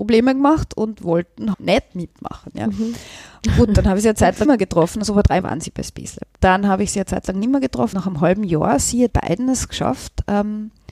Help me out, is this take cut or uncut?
cut